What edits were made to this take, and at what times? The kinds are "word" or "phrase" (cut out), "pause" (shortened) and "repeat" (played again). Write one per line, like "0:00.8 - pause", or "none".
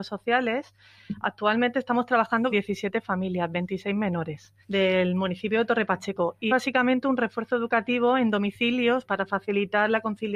0:02.5 - word
0:04.6 - pause
0:06.5 - word
0:09.0 - word